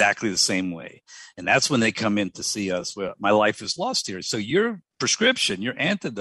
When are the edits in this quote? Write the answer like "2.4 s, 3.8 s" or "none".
4.9 s